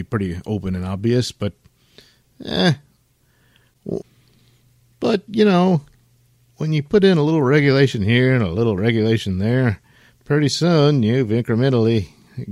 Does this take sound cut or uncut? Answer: uncut